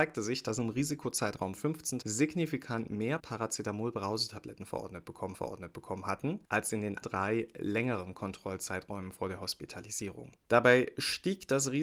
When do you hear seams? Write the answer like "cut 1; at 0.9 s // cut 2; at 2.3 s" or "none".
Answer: cut 1; at 1.6 s // cut 2; at 2.0 s // cut 3; at 3.2 s // cut 4; at 5.3 s // cut 5; at 7.0 s